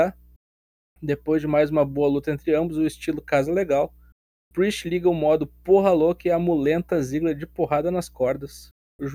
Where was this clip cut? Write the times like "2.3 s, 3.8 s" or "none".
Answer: none